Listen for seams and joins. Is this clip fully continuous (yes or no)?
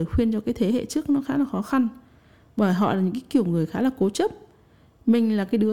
yes